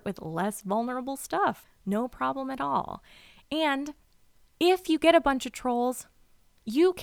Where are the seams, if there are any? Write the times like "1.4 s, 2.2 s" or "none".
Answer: none